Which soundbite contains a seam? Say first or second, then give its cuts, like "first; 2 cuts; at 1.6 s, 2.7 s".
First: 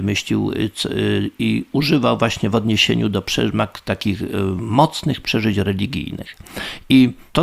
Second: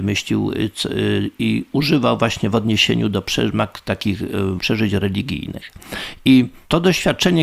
second; 1 cut; at 4.6 s